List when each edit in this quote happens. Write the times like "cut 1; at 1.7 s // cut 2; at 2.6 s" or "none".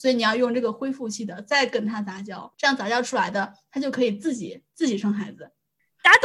cut 1; at 2.5 s

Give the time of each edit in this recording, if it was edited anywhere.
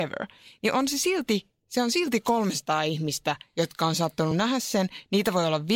none

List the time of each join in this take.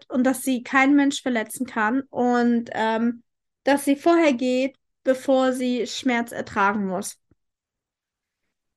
none

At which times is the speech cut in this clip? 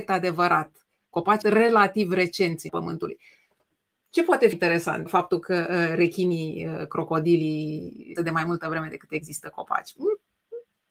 cut 1; at 1.4 s // cut 2; at 2.7 s // cut 3; at 4.5 s // cut 4; at 5.1 s // cut 5; at 8.2 s

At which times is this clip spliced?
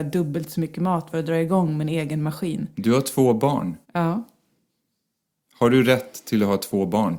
cut 1; at 1.1 s // cut 2; at 3.8 s

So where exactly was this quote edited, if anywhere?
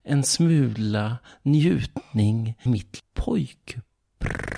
cut 1; at 2.7 s // cut 2; at 3.0 s

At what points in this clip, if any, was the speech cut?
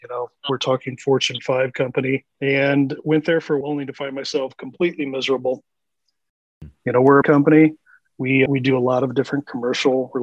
cut 1; at 2.3 s // cut 2; at 3.6 s // cut 3; at 7.2 s // cut 4; at 8.5 s

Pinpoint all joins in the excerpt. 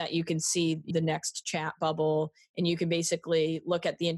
cut 1; at 0.9 s

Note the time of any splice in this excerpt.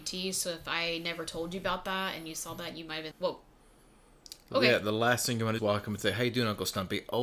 cut 1; at 3.1 s // cut 2; at 5.6 s

